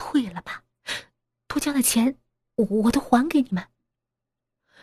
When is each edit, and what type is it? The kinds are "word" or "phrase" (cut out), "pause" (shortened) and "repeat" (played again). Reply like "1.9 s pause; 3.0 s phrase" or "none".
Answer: none